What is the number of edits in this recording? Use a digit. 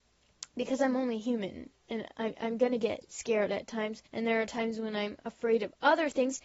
1